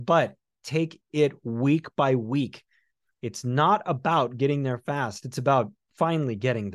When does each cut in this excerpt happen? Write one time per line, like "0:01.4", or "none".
none